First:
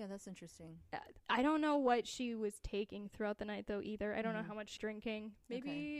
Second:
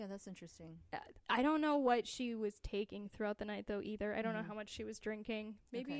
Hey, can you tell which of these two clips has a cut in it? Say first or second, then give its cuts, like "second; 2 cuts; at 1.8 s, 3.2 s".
first; 1 cut; at 4.8 s